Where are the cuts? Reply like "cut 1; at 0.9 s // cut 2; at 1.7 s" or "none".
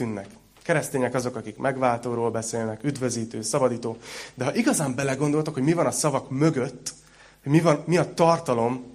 none